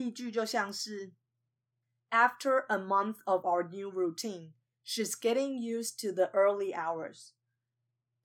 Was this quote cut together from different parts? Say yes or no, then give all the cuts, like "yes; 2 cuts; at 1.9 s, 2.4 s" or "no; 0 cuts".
no; 0 cuts